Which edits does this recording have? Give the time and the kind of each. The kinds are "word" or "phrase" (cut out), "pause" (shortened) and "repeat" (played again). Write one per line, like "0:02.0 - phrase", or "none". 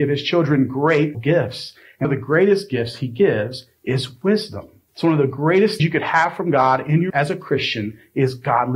0:01.1 - word
0:02.0 - word
0:04.9 - pause
0:05.8 - word
0:07.1 - word